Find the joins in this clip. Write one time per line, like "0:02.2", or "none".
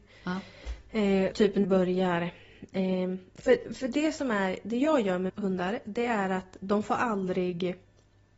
0:01.3
0:01.6
0:05.3